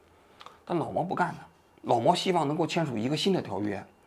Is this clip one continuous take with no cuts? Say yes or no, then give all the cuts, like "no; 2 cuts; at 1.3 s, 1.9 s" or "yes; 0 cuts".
yes; 0 cuts